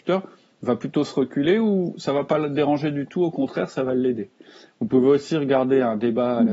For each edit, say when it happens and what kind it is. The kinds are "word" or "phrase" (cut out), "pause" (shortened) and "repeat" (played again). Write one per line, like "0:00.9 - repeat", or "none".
none